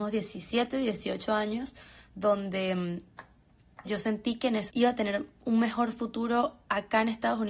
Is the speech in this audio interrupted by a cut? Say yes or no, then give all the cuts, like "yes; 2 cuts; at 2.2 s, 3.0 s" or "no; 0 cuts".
yes; 2 cuts; at 3.8 s, 4.7 s